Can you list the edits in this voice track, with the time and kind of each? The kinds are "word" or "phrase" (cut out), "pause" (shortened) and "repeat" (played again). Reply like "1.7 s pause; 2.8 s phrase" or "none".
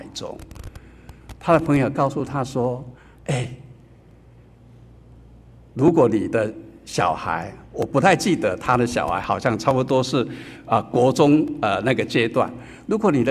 3.0 s pause; 7.6 s pause